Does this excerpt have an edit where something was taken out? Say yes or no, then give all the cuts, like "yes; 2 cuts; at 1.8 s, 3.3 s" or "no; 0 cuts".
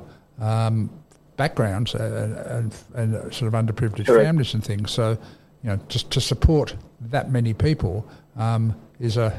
no; 0 cuts